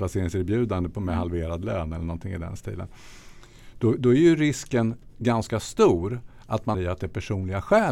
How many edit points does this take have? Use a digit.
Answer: 1